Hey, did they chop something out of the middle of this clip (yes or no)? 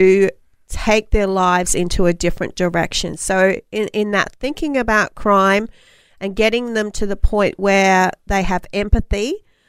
no